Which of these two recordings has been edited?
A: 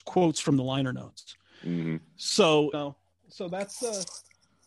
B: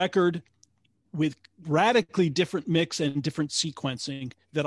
A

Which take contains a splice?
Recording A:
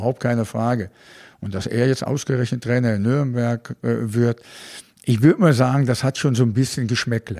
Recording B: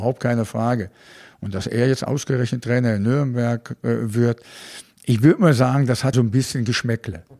B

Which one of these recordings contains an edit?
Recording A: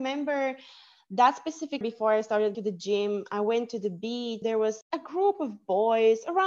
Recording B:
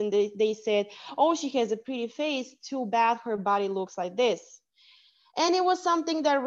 A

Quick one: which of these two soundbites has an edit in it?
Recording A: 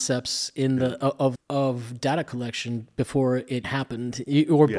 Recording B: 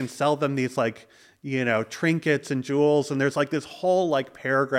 A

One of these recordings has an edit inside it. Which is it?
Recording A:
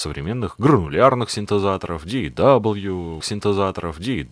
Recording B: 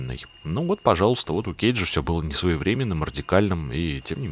A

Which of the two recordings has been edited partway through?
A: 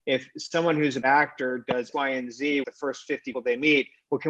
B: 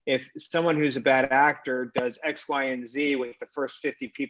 A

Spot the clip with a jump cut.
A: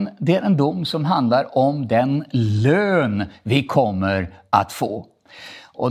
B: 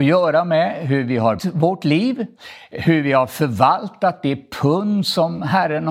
B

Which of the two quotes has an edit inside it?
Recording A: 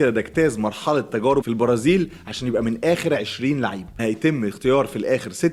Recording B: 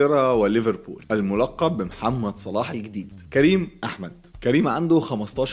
A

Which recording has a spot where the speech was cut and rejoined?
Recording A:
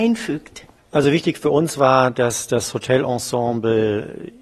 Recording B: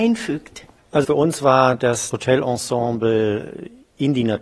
B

